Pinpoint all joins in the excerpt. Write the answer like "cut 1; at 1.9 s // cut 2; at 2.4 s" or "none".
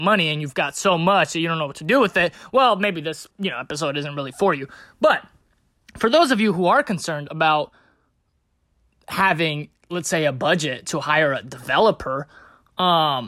cut 1; at 3.3 s